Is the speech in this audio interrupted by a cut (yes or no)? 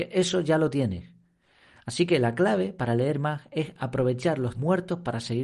yes